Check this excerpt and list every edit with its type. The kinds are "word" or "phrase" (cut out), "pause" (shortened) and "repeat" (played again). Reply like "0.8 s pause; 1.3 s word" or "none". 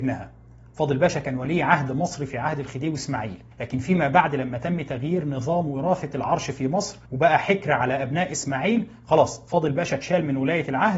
3.5 s pause; 7.0 s pause